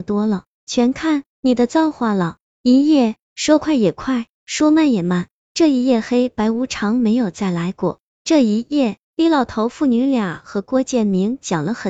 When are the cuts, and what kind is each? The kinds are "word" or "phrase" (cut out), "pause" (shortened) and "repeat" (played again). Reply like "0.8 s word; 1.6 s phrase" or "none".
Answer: 1.3 s pause; 3.2 s pause; 4.3 s pause; 9.0 s pause